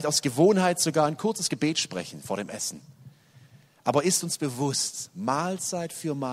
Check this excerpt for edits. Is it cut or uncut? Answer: uncut